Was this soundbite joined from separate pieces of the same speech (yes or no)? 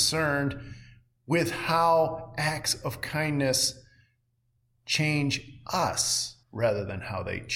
yes